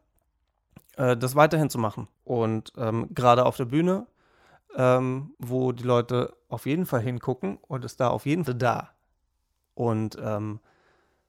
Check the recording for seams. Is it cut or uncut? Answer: cut